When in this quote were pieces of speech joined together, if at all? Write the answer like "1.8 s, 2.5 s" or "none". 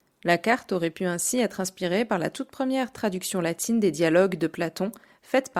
none